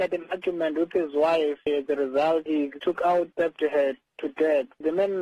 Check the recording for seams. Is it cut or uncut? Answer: cut